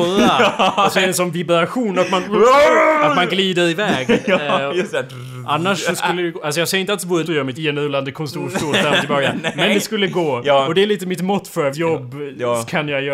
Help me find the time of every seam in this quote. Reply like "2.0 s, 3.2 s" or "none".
7.2 s, 7.5 s, 11.7 s